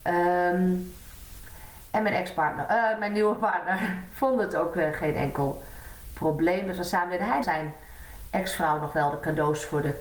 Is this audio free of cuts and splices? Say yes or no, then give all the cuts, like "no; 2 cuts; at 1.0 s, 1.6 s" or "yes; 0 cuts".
no; 1 cut; at 7.4 s